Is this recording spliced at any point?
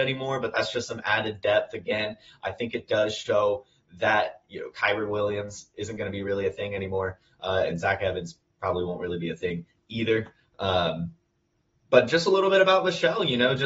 no; 0 cuts

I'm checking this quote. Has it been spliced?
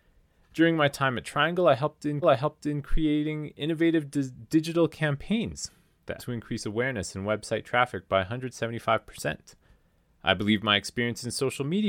yes; 2 cuts; at 2.2 s, 6.2 s

